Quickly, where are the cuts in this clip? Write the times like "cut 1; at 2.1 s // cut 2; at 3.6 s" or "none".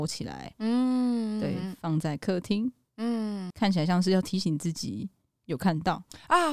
cut 1; at 3.5 s